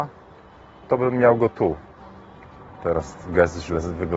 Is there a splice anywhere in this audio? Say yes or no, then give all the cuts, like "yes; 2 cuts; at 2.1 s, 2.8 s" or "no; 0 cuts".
no; 0 cuts